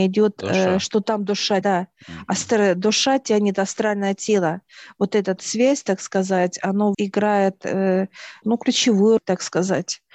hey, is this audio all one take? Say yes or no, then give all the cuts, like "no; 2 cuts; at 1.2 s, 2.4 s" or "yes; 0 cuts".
no; 5 cuts; at 1.6 s, 5.4 s, 6.9 s, 8.4 s, 9.2 s